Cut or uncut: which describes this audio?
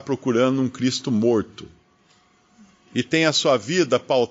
uncut